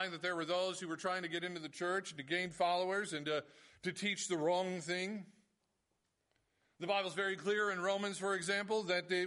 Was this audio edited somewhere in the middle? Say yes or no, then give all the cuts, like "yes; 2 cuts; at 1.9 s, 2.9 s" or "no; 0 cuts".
no; 0 cuts